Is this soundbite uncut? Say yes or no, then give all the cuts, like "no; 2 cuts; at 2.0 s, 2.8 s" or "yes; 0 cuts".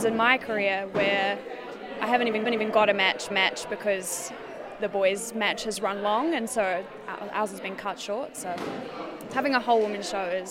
no; 2 cuts; at 2.5 s, 3.3 s